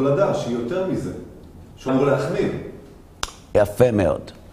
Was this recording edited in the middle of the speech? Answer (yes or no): yes